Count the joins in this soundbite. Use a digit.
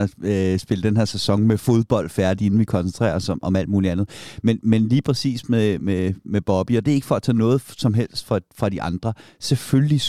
0